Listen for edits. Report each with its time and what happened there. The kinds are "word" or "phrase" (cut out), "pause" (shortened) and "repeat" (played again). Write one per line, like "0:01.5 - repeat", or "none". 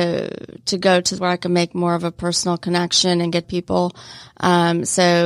0:01.2 - word
0:03.4 - phrase